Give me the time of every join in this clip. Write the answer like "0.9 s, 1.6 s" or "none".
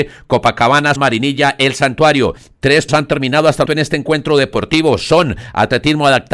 1.0 s, 2.9 s, 3.7 s